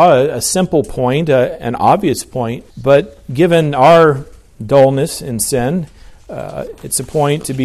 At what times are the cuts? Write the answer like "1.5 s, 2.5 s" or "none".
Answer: 2.7 s